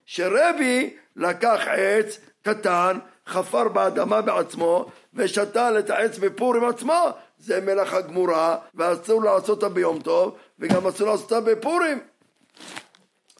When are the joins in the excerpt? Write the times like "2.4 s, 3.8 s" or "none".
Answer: 8.7 s